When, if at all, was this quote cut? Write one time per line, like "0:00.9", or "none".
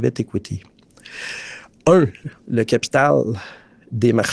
0:02.4